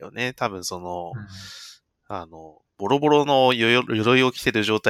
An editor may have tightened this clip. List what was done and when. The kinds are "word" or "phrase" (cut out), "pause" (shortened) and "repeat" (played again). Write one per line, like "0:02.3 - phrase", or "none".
none

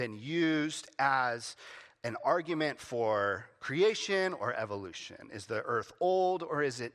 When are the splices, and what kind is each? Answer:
none

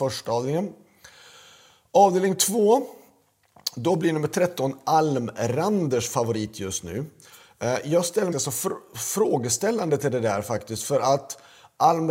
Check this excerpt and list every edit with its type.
0:08.3 - phrase

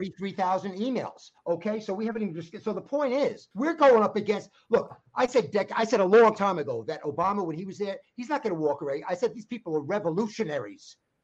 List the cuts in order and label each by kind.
0:01.4 - pause
0:03.5 - pause

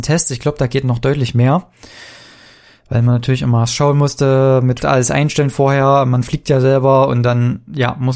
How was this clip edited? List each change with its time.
0:04.8 - word

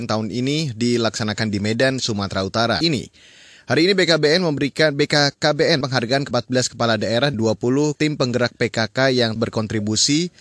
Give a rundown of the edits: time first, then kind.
0:02.8 - word
0:05.8 - word
0:06.3 - word
0:07.3 - word
0:08.0 - word
0:09.4 - word

